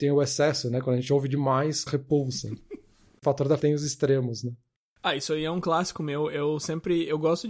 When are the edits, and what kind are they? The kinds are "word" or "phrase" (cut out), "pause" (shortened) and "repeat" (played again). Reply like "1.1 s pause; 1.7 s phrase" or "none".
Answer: 1.9 s word; 3.2 s word; 3.6 s word